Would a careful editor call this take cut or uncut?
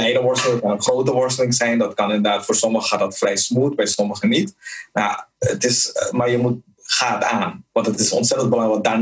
cut